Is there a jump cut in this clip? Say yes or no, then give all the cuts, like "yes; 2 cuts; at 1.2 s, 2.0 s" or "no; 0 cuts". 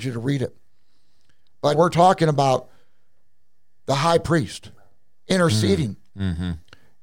yes; 1 cut; at 1.7 s